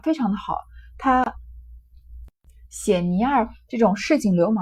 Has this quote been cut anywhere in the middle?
no; 0 cuts

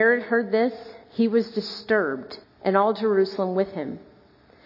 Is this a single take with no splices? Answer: no; 2 cuts; at 1.0 s, 2.4 s

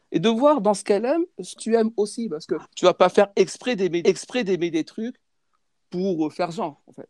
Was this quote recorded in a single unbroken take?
no; 3 cuts; at 1.6 s, 2.6 s, 4.0 s

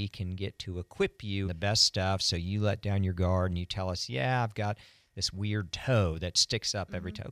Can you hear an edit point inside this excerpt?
yes; 1 cut; at 1.4 s

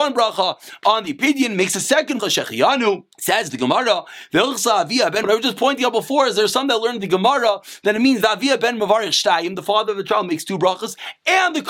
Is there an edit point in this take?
yes; 3 cuts; at 2.2 s, 3.1 s, 5.2 s

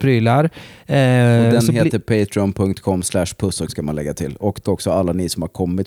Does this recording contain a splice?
yes; 2 cuts; at 3.7 s, 4.6 s

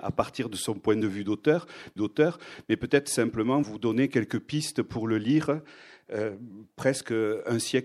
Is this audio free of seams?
no; 2 cuts; at 2.0 s, 3.6 s

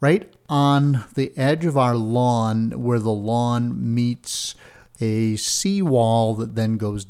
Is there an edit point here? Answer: no; 0 cuts

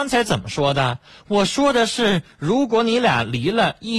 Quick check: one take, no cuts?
yes; 0 cuts

